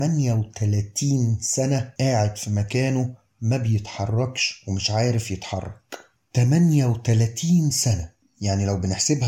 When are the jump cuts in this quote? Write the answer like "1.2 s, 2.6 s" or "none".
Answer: none

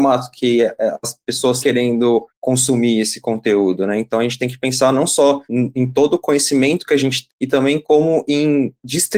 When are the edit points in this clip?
1.6 s, 2.3 s, 5.4 s, 7.3 s

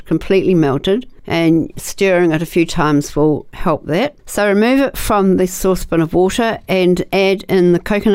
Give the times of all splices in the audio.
none

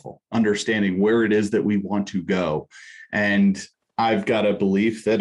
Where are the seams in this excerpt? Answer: 3.7 s

